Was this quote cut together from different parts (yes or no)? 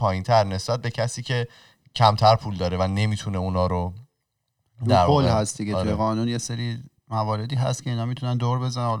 no